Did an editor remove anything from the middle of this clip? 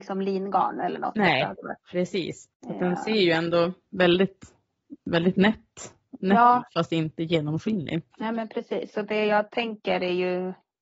yes; 2 cuts; at 2.5 s, 8.1 s

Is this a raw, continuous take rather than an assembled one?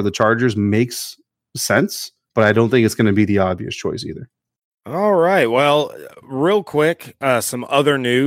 yes; 0 cuts

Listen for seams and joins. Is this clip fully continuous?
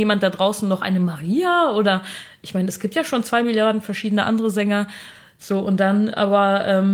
yes; 0 cuts

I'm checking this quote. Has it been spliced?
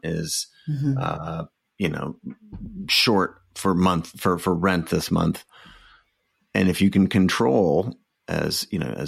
no; 0 cuts

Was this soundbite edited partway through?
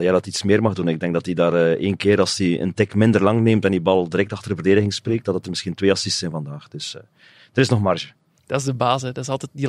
no; 0 cuts

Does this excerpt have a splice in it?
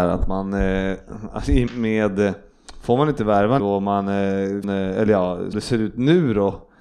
yes; 4 cuts; at 1.7 s, 3.6 s, 4.6 s, 5.5 s

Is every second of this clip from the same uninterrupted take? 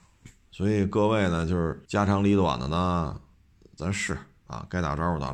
no; 1 cut; at 1.8 s

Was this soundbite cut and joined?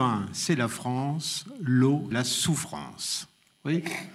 yes; 1 cut; at 2.1 s

